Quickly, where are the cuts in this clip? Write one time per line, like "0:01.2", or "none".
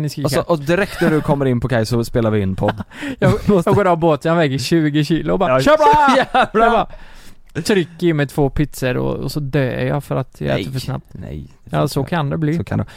none